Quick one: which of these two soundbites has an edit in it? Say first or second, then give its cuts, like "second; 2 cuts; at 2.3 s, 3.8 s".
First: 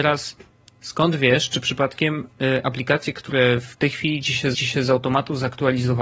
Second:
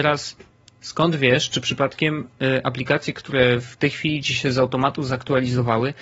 first; 1 cut; at 4.5 s